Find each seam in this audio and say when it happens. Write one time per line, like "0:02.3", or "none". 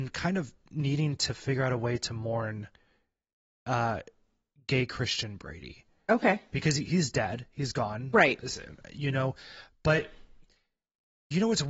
none